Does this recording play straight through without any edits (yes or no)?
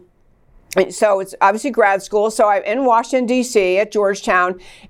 yes